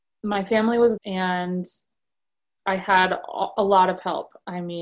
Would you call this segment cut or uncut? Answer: cut